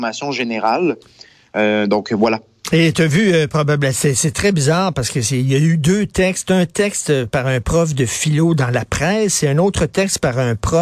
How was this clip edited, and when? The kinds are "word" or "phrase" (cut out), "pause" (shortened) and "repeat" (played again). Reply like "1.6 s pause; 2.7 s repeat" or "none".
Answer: none

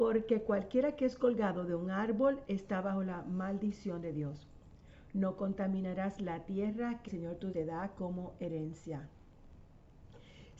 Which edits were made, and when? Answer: 7.1 s word; 7.5 s word

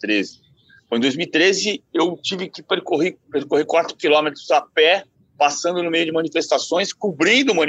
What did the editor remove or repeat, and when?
3.2 s pause; 5.1 s pause

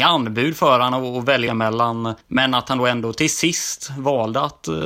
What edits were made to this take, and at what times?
1.5 s phrase; 2.2 s pause

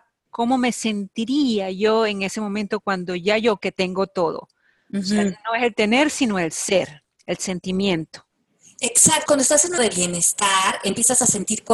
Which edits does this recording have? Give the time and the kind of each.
3.6 s word; 9.3 s word; 9.8 s word

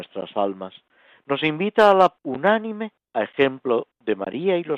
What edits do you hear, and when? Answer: 2.2 s word; 3.0 s pause

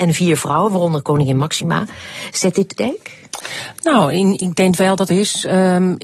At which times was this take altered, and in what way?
2.8 s phrase; 5.1 s phrase

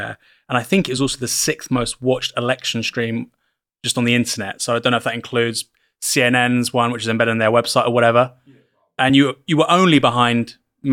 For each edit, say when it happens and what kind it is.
none

